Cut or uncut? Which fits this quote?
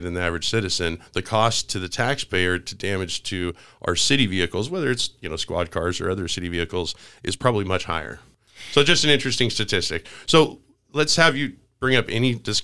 uncut